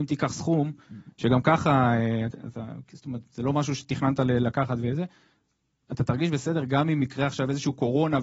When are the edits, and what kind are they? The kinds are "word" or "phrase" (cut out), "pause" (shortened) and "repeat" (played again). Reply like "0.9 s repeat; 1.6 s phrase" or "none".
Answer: 5.9 s word